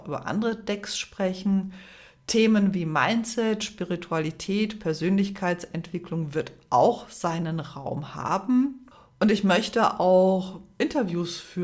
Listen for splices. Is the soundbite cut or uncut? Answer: uncut